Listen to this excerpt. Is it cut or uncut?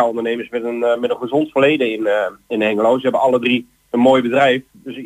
cut